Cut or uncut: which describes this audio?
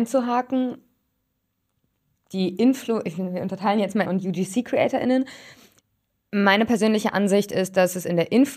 cut